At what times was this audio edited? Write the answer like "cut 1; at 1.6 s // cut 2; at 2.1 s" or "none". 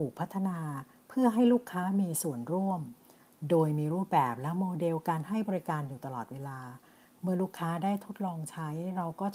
none